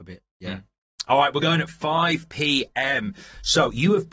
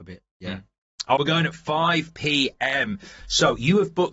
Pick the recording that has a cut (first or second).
second